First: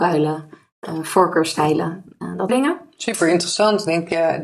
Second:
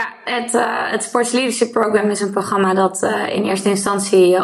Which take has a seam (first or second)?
first